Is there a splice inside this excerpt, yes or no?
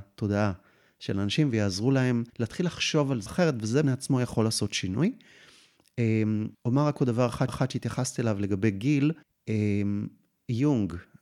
yes